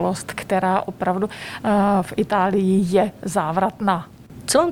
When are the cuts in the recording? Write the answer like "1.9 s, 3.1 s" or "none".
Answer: none